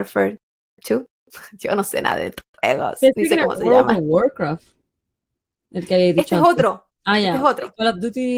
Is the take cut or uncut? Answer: uncut